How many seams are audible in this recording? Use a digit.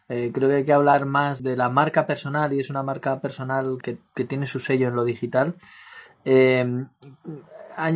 2